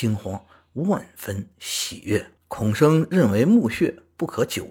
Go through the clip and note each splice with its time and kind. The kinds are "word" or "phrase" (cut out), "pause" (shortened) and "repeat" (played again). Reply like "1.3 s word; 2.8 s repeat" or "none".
2.4 s pause